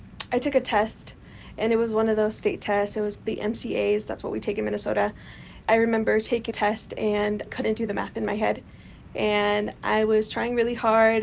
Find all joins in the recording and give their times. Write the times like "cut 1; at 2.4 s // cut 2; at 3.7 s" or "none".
cut 1; at 3.3 s // cut 2; at 5.6 s // cut 3; at 6.5 s // cut 4; at 7.5 s